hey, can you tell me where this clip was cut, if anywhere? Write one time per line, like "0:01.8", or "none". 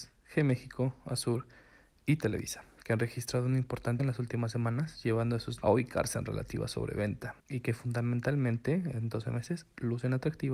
0:04.0
0:05.6
0:07.4